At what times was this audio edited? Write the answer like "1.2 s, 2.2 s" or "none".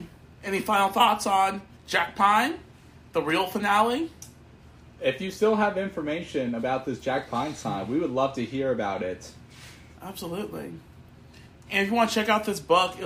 none